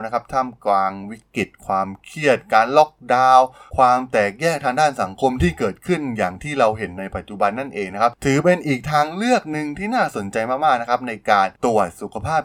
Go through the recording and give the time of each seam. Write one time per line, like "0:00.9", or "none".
0:03.7